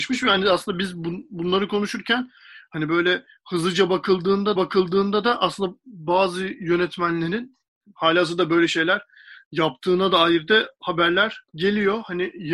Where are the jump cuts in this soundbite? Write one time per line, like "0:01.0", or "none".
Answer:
0:04.6
0:07.7
0:11.5